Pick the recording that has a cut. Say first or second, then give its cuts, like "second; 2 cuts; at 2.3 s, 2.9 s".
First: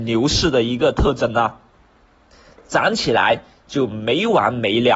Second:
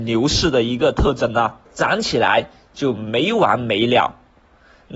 second; 1 cut; at 1.7 s